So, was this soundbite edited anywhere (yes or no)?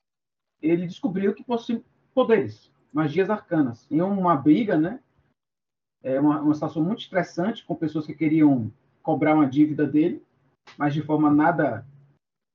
no